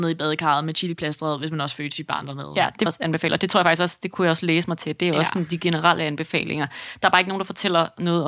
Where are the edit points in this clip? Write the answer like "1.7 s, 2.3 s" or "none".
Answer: 2.9 s